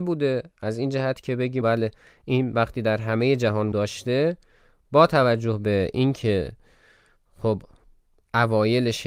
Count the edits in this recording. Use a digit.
2